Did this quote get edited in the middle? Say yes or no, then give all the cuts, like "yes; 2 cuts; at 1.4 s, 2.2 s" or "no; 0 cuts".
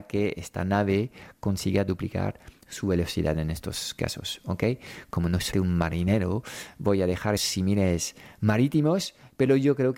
yes; 2 cuts; at 5.5 s, 7.4 s